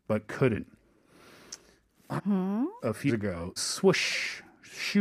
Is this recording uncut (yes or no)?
no